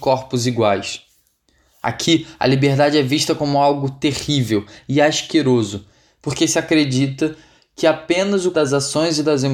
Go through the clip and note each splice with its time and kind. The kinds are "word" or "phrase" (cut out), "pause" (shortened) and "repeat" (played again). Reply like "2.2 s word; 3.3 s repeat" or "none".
8.5 s word